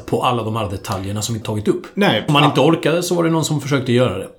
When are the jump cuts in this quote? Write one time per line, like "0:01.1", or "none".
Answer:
0:01.4
0:02.3